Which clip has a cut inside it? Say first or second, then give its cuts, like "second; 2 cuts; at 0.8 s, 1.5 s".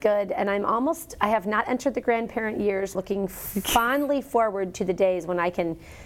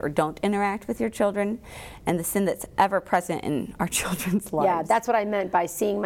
first; 1 cut; at 2.9 s